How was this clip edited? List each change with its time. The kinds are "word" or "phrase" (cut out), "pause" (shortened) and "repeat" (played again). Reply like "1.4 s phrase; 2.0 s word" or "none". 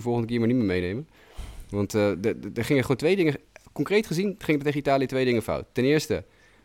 none